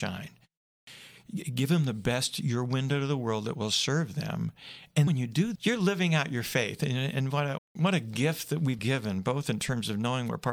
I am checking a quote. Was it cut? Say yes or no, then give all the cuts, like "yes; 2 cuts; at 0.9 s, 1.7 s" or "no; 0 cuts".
yes; 4 cuts; at 5.1 s, 5.6 s, 7.6 s, 8.8 s